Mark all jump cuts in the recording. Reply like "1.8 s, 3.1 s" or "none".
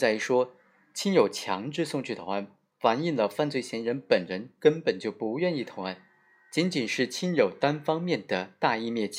none